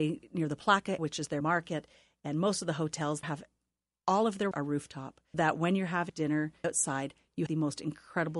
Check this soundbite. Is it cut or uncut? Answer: cut